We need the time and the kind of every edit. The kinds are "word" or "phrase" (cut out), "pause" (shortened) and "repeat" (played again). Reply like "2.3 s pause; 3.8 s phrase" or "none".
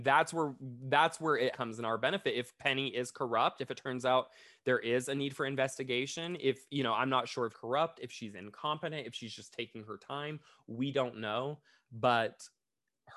1.5 s word; 2.6 s word; 7.5 s word